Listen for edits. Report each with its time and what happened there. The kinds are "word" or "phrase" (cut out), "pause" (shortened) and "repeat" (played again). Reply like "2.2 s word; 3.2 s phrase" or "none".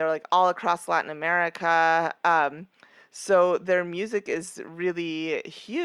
none